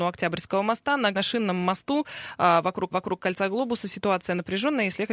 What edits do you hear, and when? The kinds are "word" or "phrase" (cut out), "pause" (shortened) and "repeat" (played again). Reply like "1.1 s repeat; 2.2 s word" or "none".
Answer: 1.1 s phrase; 2.9 s repeat